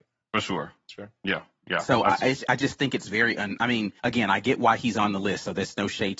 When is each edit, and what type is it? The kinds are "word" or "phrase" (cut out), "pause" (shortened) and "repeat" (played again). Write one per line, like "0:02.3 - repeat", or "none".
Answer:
0:04.0 - pause